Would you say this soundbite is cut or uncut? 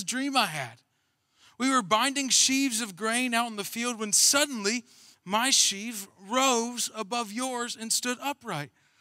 uncut